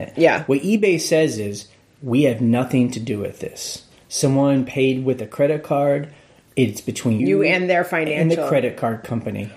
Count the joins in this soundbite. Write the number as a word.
one